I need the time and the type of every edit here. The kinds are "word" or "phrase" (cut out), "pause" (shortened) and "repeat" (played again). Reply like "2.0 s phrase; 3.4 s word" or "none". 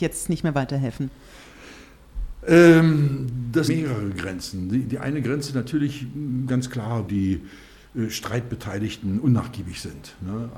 3.7 s word; 7.1 s word

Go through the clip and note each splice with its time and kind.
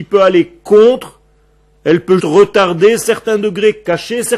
2.2 s word

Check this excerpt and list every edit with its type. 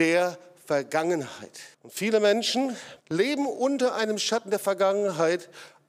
1.7 s pause; 3.0 s pause

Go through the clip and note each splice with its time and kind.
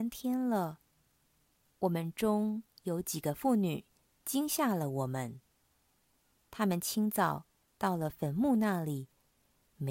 none

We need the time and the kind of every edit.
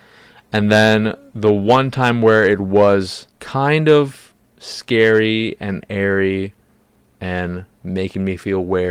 3.3 s pause; 7.7 s pause

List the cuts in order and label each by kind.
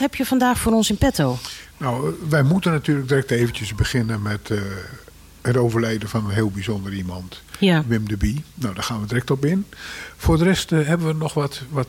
none

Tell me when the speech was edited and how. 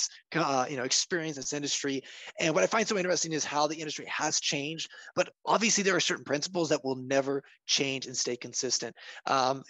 1.3 s word

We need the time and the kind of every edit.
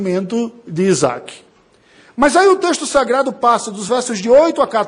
none

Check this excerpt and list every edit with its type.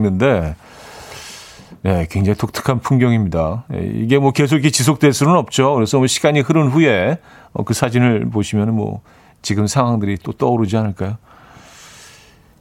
none

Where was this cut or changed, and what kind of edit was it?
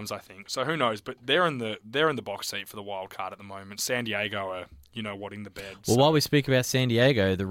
none

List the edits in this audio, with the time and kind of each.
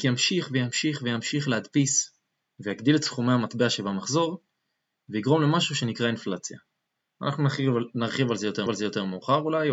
8.7 s repeat

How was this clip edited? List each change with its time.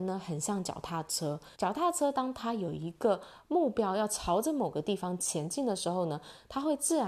1.5 s pause

